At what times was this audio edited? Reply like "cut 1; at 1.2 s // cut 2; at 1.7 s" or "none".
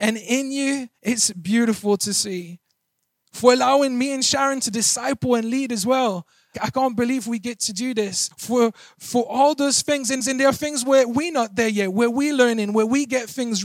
cut 1; at 1.0 s // cut 2; at 6.5 s // cut 3; at 8.3 s // cut 4; at 10.2 s